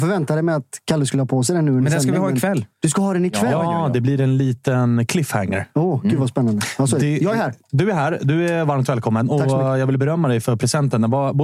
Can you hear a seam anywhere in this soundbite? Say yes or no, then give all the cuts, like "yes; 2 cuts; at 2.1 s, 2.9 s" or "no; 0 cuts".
yes; 1 cut; at 2.7 s